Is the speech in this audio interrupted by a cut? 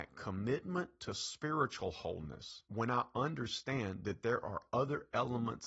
yes; 1 cut; at 2.7 s

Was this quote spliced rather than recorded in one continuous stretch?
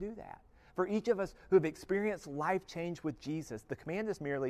no; 0 cuts

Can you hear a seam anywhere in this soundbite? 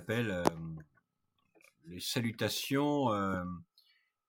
no; 0 cuts

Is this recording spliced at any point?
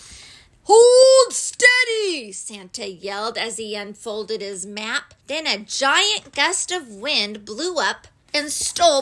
yes; 1 cut; at 5.2 s

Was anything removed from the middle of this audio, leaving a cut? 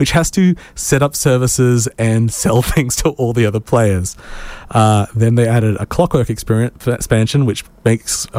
no; 0 cuts

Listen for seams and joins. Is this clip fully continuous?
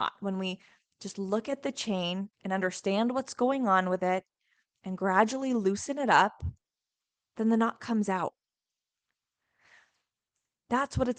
no; 1 cut; at 2.3 s

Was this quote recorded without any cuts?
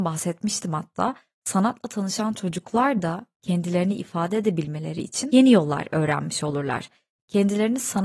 yes; 0 cuts

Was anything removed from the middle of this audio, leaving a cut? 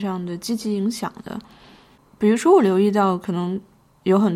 no; 0 cuts

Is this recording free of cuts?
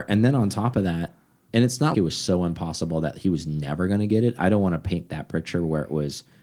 no; 1 cut; at 1.9 s

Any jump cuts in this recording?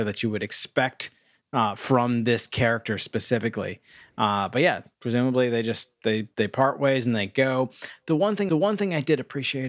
yes; 1 cut; at 8.5 s

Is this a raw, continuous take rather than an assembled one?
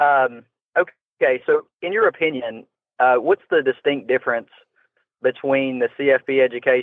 yes; 0 cuts

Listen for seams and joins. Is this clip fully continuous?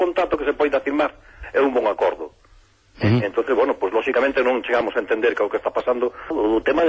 yes; 0 cuts

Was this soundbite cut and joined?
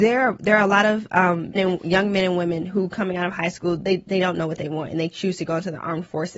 yes; 1 cut; at 1.6 s

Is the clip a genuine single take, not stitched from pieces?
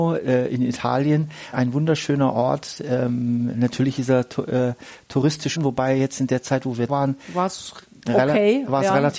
no; 3 cuts; at 1.5 s, 5.6 s, 6.9 s

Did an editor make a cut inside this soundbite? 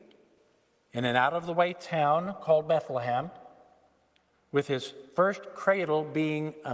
no; 0 cuts

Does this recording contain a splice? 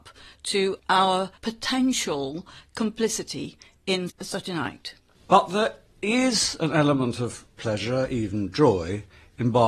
no; 0 cuts

